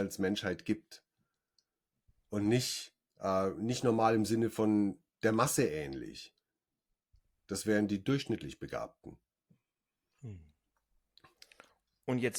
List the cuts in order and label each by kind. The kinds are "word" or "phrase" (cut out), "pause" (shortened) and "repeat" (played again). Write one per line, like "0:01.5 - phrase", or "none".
none